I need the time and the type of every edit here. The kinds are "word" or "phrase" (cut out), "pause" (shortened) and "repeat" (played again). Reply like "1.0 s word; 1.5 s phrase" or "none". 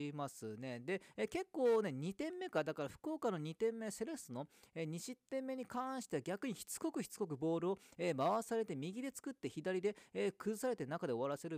none